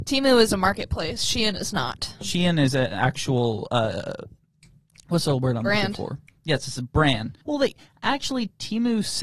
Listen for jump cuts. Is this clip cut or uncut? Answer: cut